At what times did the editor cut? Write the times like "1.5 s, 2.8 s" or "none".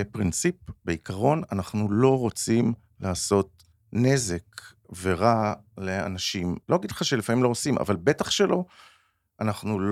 3.7 s, 6.6 s